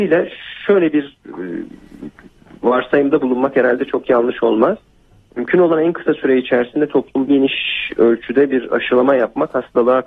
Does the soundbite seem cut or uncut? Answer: cut